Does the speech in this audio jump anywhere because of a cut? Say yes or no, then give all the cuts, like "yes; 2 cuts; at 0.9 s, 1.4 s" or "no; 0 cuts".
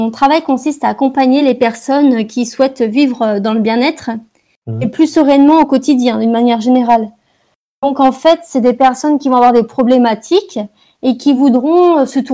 no; 0 cuts